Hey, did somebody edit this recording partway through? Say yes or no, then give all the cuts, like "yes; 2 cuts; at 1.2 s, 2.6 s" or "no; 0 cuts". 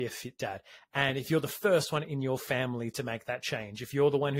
no; 0 cuts